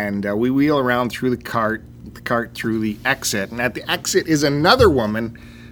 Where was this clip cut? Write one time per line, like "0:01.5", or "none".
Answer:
0:02.1